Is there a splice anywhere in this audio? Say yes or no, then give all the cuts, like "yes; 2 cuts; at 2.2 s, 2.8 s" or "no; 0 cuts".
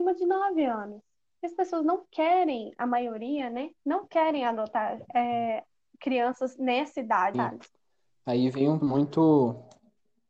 yes; 2 cuts; at 7.3 s, 8.8 s